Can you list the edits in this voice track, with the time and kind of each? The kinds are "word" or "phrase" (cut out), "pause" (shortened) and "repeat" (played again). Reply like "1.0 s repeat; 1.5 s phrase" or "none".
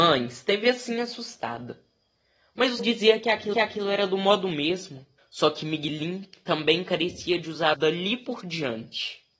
2.8 s word; 3.5 s repeat; 5.2 s pause; 7.7 s word